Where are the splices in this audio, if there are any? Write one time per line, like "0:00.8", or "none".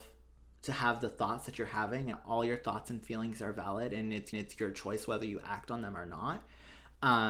0:02.1
0:04.3